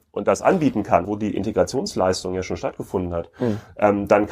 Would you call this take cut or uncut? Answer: cut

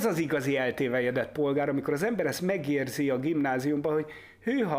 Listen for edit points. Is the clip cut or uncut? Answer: uncut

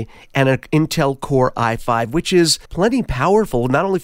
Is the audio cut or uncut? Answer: cut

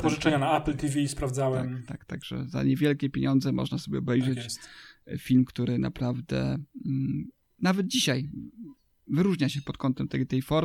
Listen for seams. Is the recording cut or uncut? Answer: uncut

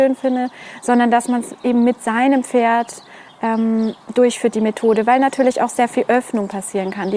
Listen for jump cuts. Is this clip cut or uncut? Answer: uncut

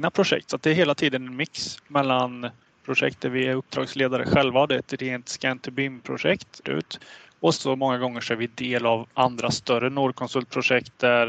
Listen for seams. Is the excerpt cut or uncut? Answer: cut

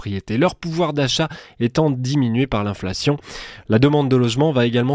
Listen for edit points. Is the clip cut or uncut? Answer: uncut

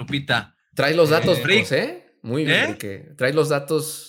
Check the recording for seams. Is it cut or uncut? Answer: cut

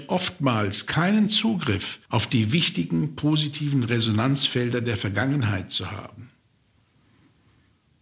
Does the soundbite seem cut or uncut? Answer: cut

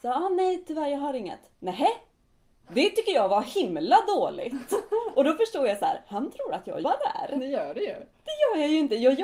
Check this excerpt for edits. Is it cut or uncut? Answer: cut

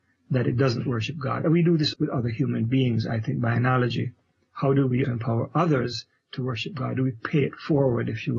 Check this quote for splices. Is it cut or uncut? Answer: cut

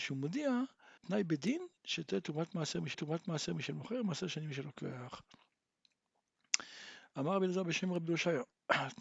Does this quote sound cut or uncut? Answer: cut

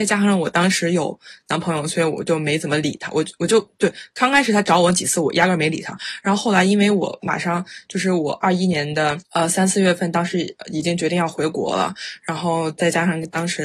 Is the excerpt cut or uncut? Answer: cut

